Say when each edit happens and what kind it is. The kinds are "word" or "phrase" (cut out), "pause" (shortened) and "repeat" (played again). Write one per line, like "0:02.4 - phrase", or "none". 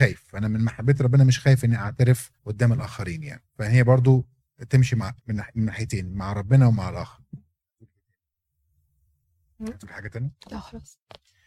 0:02.4 - pause
0:03.5 - pause
0:05.2 - pause